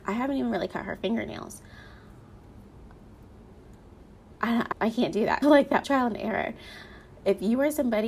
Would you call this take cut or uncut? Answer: cut